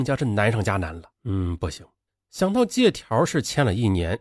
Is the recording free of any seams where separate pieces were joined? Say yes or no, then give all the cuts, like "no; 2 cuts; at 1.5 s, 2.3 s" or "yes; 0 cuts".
no; 2 cuts; at 1.1 s, 2.1 s